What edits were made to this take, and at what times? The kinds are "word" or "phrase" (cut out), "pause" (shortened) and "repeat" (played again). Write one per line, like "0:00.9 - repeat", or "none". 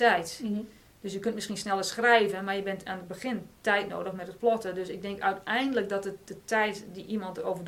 none